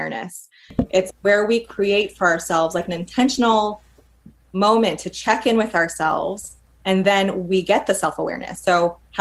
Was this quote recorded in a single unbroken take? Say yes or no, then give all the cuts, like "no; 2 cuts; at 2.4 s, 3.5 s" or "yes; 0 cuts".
yes; 0 cuts